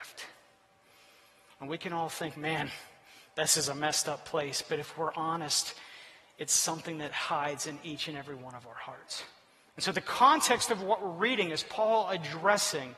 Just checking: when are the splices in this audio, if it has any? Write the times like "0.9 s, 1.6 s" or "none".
none